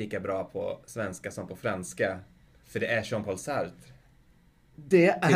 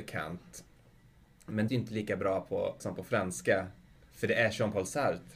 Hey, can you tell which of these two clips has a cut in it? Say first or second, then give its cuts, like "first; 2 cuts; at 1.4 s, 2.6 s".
second; 2 cuts; at 1.7 s, 2.8 s